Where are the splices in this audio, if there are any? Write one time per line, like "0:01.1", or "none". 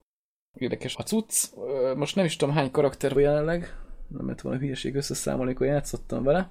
0:00.9
0:03.2